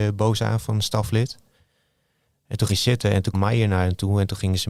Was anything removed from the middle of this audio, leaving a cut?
yes; 2 cuts; at 2.7 s, 3.3 s

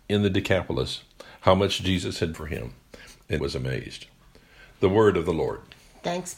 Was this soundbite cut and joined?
yes; 2 cuts; at 2.3 s, 3.4 s

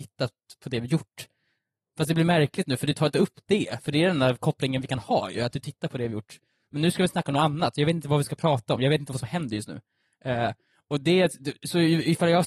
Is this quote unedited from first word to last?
yes; 0 cuts

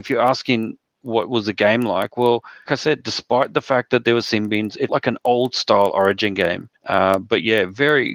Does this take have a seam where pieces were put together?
yes; 3 cuts; at 2.7 s, 4.9 s, 6.8 s

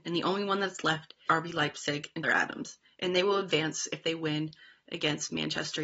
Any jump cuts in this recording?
yes; 2 cuts; at 1.3 s, 2.2 s

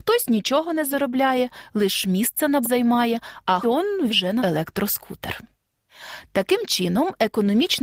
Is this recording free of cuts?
no; 4 cuts; at 2.6 s, 3.6 s, 4.1 s, 4.4 s

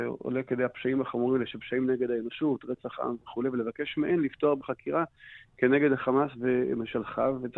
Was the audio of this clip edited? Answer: no; 0 cuts

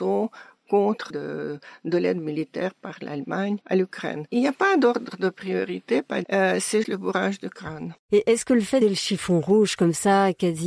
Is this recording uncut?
no; 5 cuts; at 1.1 s, 3.6 s, 6.2 s, 6.8 s, 8.8 s

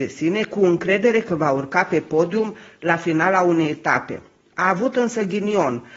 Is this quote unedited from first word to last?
yes; 0 cuts

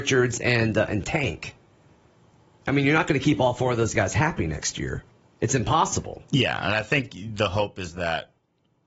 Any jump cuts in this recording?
no; 0 cuts

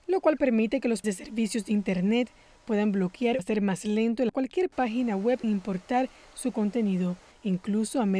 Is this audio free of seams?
no; 4 cuts; at 1.0 s, 3.4 s, 4.3 s, 5.4 s

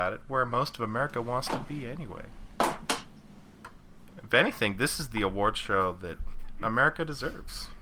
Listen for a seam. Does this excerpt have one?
no; 0 cuts

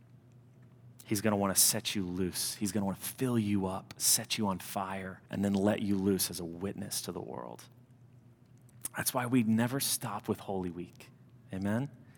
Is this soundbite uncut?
no; 1 cut; at 5.3 s

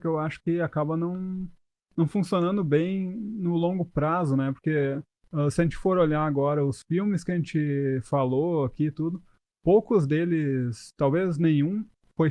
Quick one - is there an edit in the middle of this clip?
no; 0 cuts

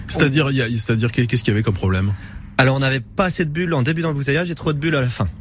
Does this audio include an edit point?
no; 0 cuts

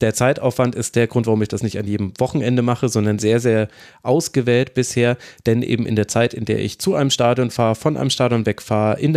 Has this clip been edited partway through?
no; 0 cuts

